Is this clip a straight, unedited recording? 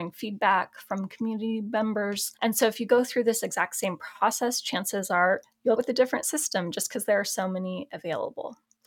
no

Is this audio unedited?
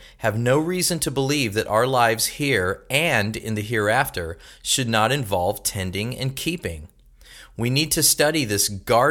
yes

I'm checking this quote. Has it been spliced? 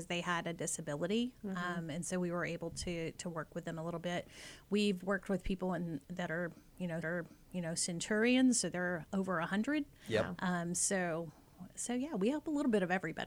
yes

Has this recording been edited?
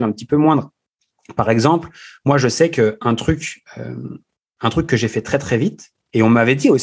no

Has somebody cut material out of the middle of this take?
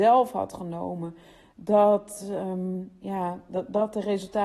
no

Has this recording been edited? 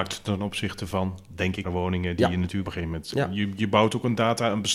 yes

